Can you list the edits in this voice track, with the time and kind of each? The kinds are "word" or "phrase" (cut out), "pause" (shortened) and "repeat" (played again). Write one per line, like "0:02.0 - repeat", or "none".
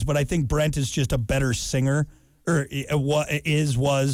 none